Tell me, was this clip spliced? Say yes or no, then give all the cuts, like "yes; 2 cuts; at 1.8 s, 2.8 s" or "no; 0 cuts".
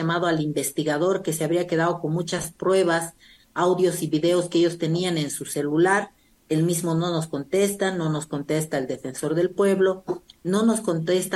no; 0 cuts